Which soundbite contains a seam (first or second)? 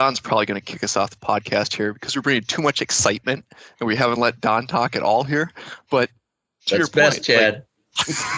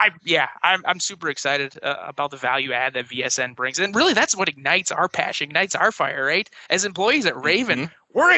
second